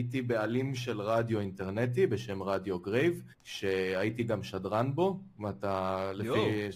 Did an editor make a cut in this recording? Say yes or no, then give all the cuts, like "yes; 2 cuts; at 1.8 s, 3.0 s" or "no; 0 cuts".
yes; 1 cut; at 3.3 s